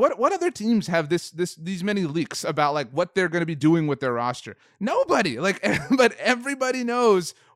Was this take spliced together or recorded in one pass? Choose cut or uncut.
uncut